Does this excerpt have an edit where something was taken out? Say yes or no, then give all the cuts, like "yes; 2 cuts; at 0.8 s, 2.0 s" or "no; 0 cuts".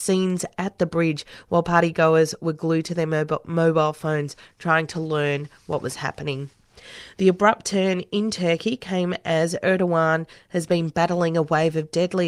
no; 0 cuts